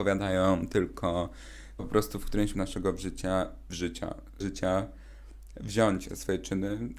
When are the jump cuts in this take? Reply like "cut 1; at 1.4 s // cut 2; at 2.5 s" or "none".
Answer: cut 1; at 1.8 s // cut 2; at 2.5 s // cut 3; at 3.7 s // cut 4; at 4.4 s // cut 5; at 6.1 s